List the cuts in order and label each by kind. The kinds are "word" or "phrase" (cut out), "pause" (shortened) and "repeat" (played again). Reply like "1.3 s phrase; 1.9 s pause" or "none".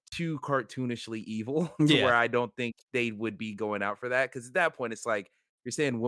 2.8 s pause